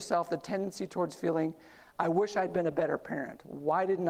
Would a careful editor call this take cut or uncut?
uncut